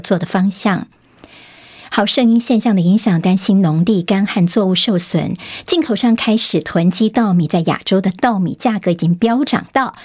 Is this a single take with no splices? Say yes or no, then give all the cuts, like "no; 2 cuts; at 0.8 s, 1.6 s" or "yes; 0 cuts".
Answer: yes; 0 cuts